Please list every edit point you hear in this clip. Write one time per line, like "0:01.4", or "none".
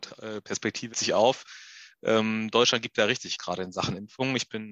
0:00.9
0:03.4